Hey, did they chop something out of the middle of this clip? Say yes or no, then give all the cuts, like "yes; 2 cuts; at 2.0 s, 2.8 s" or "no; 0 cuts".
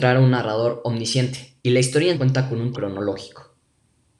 yes; 3 cuts; at 1.6 s, 2.1 s, 2.7 s